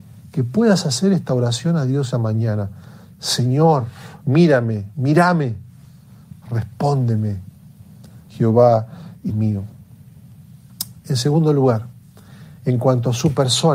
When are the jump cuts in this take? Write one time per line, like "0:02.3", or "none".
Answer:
0:02.1
0:04.2
0:08.2
0:09.3